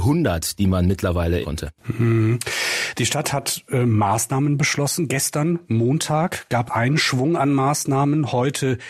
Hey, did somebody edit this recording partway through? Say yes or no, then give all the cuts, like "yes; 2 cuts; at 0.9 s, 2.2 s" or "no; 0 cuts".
yes; 2 cuts; at 1.4 s, 6.7 s